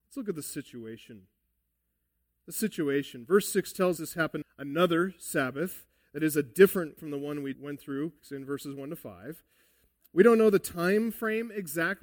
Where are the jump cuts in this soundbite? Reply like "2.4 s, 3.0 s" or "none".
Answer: 4.0 s, 4.4 s, 7.0 s